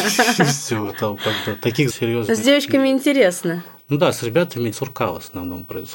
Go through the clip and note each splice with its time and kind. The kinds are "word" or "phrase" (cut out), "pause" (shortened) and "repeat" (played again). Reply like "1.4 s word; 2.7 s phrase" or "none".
1.9 s word; 4.7 s word